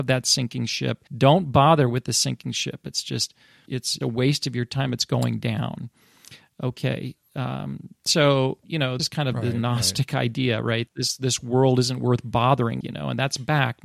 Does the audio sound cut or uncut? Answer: cut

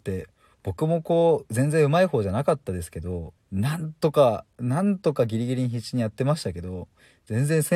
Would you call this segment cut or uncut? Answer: cut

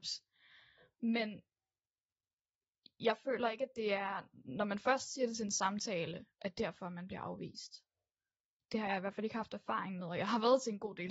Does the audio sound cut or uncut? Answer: uncut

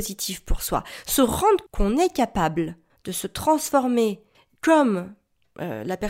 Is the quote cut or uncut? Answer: cut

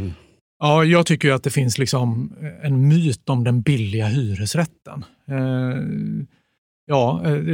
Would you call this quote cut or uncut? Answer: uncut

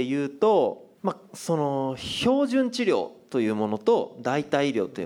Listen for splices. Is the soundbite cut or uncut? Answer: cut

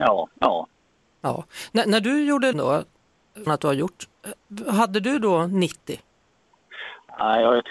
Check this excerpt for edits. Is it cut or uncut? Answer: cut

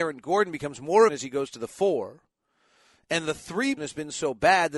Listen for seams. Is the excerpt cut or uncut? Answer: cut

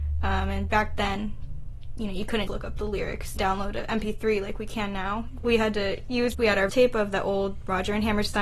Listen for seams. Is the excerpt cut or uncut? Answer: cut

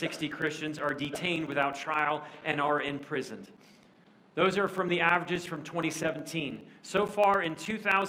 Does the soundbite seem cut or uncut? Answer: uncut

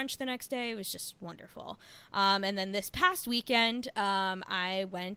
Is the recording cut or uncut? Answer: uncut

